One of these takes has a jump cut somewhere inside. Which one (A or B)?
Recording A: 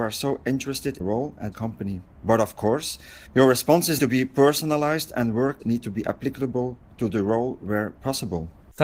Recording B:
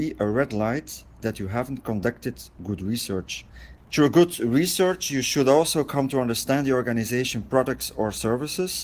A